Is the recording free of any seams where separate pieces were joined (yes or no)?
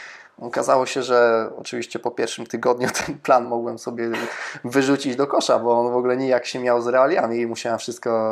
yes